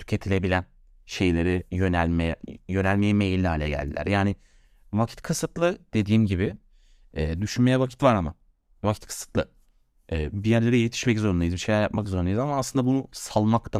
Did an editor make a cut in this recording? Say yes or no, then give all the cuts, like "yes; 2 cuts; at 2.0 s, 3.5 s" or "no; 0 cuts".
no; 0 cuts